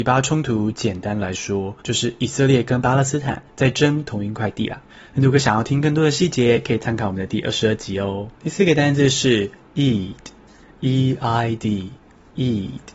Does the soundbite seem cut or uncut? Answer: cut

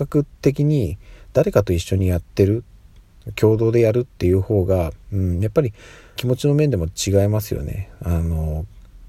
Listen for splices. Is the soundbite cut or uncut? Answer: cut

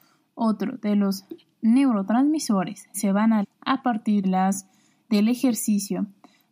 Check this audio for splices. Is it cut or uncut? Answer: cut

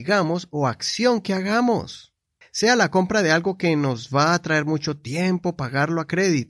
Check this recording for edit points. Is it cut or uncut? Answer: cut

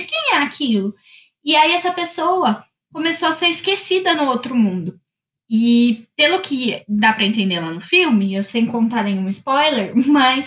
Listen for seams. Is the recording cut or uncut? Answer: uncut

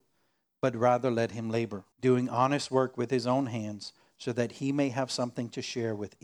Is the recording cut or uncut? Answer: cut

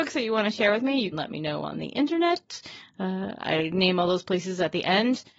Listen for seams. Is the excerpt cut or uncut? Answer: cut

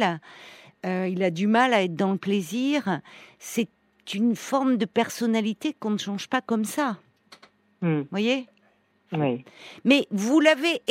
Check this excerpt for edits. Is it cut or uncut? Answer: uncut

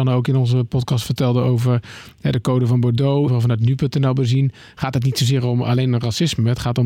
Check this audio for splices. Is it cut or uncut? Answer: cut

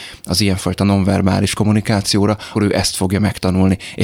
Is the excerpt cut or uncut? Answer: cut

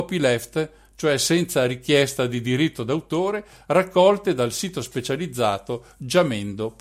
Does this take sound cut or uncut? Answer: uncut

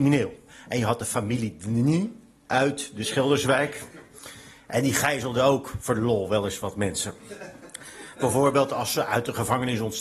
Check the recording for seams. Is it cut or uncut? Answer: uncut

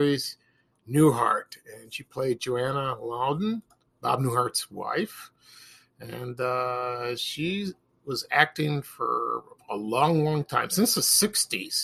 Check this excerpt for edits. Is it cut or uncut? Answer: cut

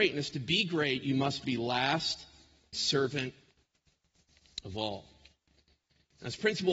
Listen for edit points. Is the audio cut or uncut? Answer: cut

